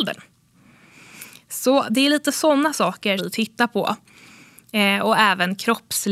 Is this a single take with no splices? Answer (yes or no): no